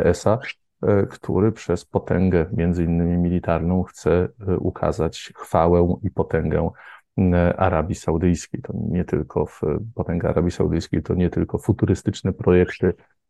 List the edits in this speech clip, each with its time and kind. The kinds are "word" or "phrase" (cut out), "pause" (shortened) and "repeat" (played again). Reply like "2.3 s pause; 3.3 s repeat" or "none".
none

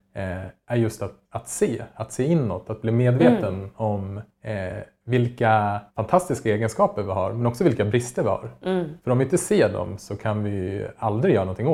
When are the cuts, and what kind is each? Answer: 1.2 s pause; 4.3 s pause; 5.9 s pause

